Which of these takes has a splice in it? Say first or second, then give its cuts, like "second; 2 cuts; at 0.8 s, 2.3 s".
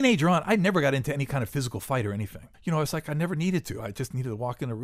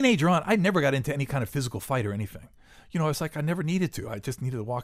first; 1 cut; at 2.5 s